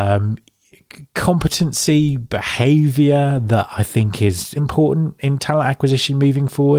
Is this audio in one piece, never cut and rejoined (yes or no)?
no